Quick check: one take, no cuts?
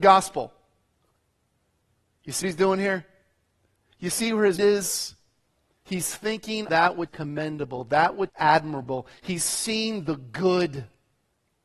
no; 5 cuts; at 2.4 s, 4.6 s, 6.7 s, 7.1 s, 8.3 s

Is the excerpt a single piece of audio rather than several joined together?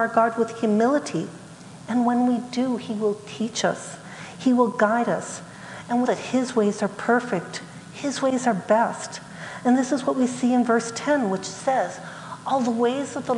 no; 1 cut; at 6.0 s

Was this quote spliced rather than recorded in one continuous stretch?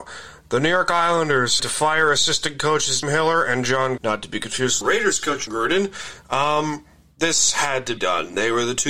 yes; 7 cuts; at 1.6 s, 3.0 s, 4.0 s, 4.8 s, 5.5 s, 7.0 s, 8.0 s

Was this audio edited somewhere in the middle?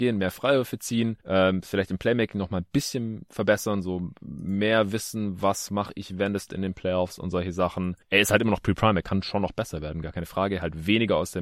yes; 3 cuts; at 1.2 s, 6.5 s, 8.0 s

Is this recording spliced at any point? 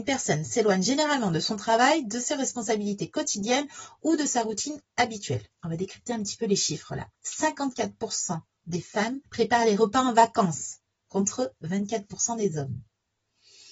yes; 4 cuts; at 5.5 s, 7.1 s, 9.3 s, 10.9 s

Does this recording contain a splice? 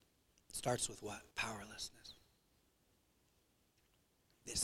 yes; 1 cut; at 1.3 s

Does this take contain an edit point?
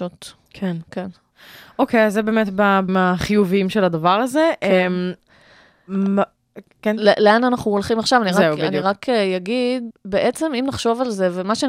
yes; 3 cuts; at 2.9 s, 6.8 s, 9.9 s

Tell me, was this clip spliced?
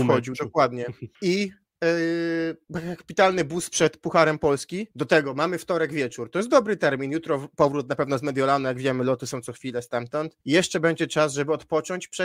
yes; 3 cuts; at 1.1 s, 4.9 s, 10.4 s

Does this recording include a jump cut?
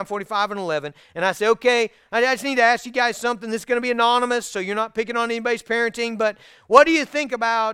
no; 0 cuts

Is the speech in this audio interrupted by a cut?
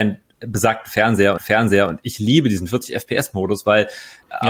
yes; 1 cut; at 1.4 s

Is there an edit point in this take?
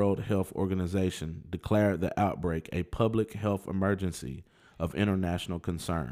no; 0 cuts

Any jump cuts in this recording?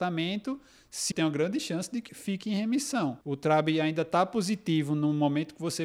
yes; 3 cuts; at 1.1 s, 2.1 s, 3.2 s

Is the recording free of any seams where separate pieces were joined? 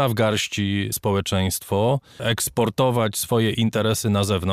no; 2 cuts; at 0.9 s, 2.2 s

